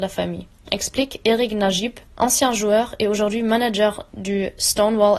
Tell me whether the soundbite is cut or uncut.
cut